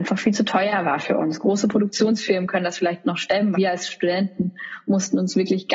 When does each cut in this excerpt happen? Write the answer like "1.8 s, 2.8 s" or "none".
3.5 s